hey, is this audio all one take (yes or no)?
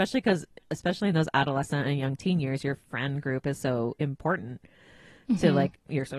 yes